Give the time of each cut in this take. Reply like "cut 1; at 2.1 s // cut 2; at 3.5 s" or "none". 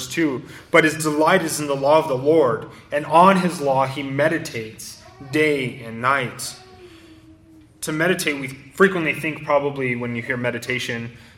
none

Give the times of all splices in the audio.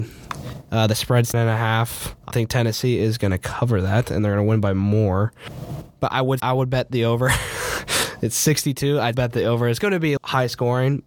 cut 1; at 1.3 s // cut 2; at 2.3 s // cut 3; at 6.4 s // cut 4; at 9.1 s // cut 5; at 9.8 s // cut 6; at 10.2 s

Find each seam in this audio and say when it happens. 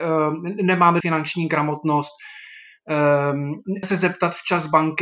cut 1; at 1.0 s // cut 2; at 3.8 s

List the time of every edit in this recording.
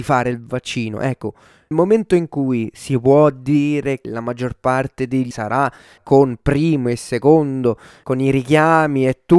cut 1; at 1.7 s // cut 2; at 4.0 s // cut 3; at 5.3 s // cut 4; at 6.0 s // cut 5; at 8.0 s

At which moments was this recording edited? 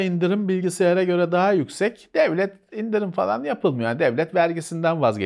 none

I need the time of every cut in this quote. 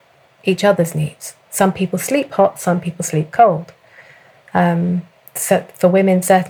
none

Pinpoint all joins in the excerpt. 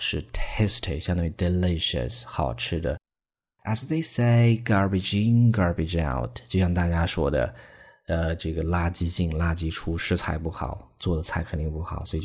none

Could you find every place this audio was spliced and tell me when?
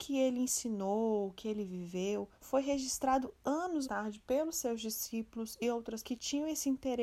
cut 1; at 2.4 s // cut 2; at 3.8 s // cut 3; at 6.0 s

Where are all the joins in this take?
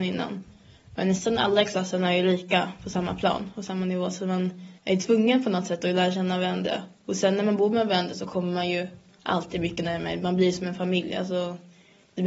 cut 1; at 4.8 s

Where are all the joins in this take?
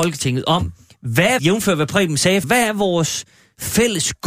cut 1; at 1.4 s // cut 2; at 2.4 s

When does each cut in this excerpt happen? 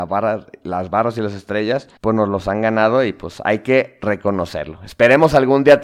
cut 1; at 2.0 s

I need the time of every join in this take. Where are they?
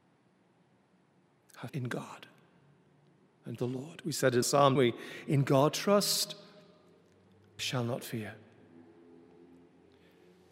cut 1; at 1.7 s // cut 2; at 3.6 s // cut 3; at 4.4 s // cut 4; at 4.8 s // cut 5; at 5.7 s // cut 6; at 7.6 s

